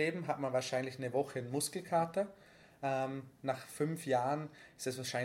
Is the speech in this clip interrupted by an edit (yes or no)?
no